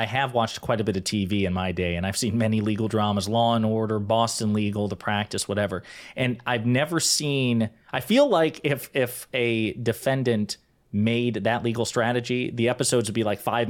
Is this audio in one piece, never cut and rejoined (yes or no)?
yes